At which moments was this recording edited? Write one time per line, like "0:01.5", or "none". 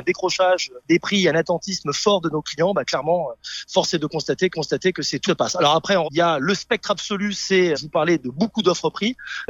0:04.5
0:05.3
0:06.0
0:07.7